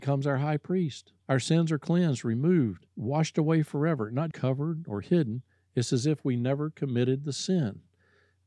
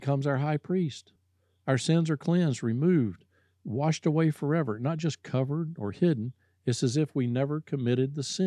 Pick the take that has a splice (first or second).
first